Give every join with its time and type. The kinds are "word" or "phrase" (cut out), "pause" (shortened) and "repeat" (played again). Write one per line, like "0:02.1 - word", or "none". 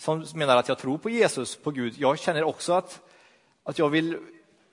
none